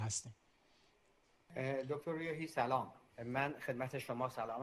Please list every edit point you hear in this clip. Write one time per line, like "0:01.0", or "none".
0:03.1